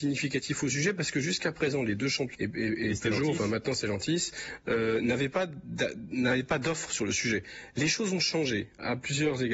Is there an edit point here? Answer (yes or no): yes